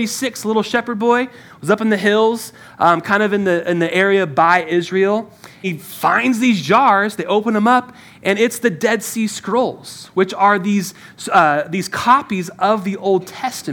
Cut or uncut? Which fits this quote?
cut